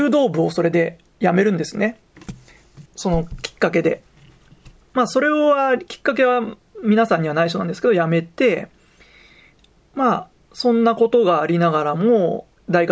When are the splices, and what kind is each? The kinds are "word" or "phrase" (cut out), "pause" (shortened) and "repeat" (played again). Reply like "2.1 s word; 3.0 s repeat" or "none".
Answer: 2.9 s pause